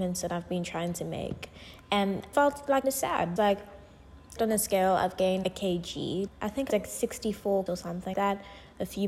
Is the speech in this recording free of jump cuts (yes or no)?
no